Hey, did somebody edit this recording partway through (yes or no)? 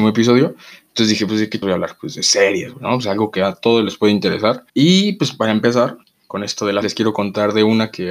yes